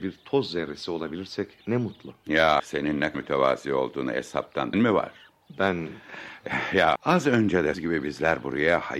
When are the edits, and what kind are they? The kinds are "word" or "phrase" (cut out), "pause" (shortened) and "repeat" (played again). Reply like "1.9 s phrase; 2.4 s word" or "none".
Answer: 2.6 s word; 3.1 s word; 4.7 s word; 7.0 s word; 7.7 s word